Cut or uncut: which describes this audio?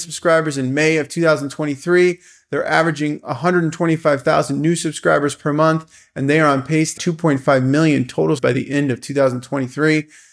cut